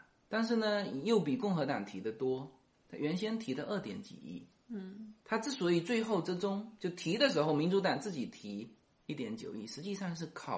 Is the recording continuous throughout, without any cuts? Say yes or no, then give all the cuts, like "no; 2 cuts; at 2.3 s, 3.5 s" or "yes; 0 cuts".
no; 2 cuts; at 5.2 s, 8.8 s